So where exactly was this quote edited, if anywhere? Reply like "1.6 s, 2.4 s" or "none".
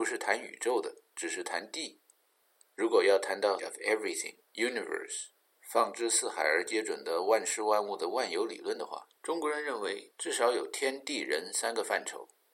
3.6 s, 4.4 s, 9.2 s